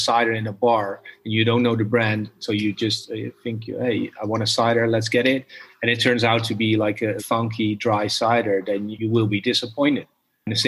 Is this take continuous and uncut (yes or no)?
no